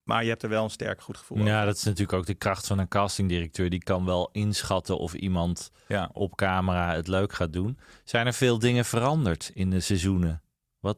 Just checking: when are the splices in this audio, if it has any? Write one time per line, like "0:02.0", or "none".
none